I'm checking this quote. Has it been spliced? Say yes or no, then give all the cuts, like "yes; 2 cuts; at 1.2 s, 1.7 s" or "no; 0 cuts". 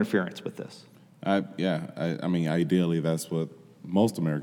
no; 0 cuts